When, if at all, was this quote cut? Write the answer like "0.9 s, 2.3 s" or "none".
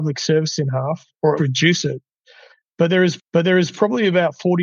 1.4 s, 3.2 s

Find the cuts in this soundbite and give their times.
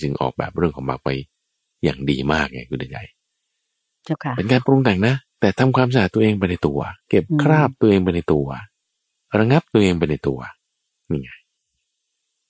5.3 s, 7.0 s

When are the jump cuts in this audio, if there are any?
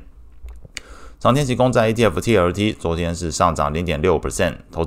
none

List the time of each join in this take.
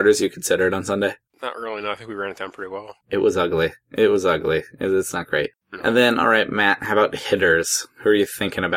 3.0 s

